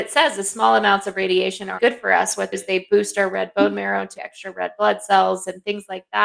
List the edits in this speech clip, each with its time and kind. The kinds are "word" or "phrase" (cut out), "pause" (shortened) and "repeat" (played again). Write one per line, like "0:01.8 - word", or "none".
0:01.8 - word
0:02.5 - phrase
0:04.1 - word